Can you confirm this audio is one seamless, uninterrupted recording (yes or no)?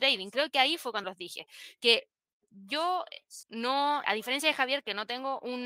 no